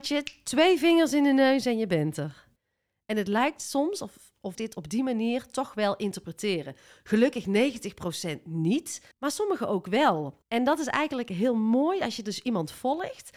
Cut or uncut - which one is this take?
cut